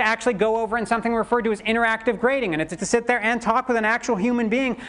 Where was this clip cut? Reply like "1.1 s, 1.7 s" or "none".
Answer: 2.8 s